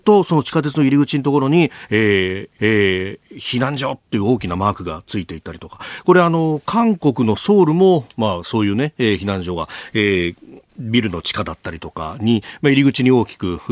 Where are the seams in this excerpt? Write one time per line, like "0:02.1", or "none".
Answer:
0:02.6
0:10.7